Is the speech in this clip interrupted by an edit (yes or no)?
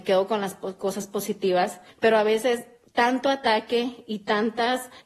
no